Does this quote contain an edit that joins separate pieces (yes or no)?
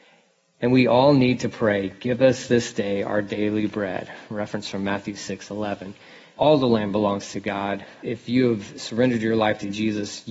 no